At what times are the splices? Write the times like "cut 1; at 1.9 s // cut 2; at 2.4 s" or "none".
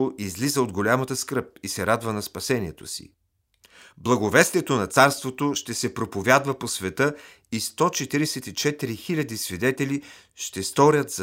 none